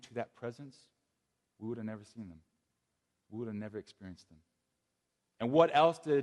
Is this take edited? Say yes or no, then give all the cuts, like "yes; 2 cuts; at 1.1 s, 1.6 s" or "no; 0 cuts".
no; 0 cuts